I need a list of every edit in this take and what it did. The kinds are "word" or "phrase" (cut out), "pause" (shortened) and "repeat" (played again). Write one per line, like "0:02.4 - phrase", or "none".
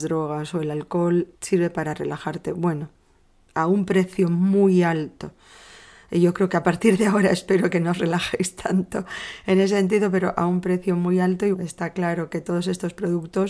0:01.3 - pause
0:11.5 - word